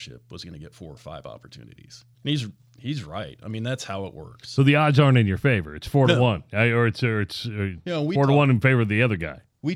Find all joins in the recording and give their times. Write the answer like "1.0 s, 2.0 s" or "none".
2.1 s